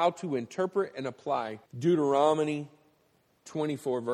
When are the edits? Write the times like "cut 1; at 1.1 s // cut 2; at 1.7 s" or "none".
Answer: cut 1; at 1.7 s